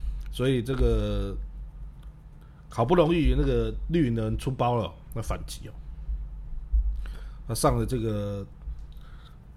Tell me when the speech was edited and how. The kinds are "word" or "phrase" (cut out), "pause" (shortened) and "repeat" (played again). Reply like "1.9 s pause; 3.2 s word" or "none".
none

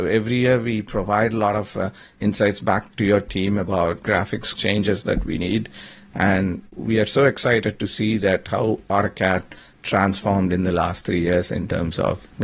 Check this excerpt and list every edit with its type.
4.6 s phrase

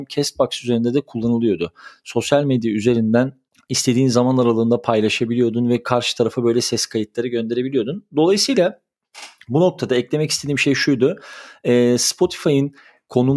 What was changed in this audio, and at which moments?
3.5 s pause

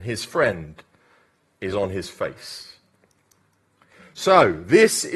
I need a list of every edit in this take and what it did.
none

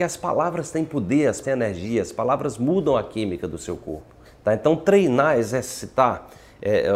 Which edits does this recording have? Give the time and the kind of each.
1.4 s word; 4.2 s pause

